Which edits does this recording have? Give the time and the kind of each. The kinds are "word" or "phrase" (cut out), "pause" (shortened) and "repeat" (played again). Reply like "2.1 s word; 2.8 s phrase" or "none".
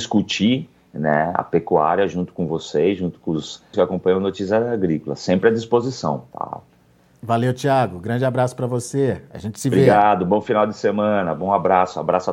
3.7 s word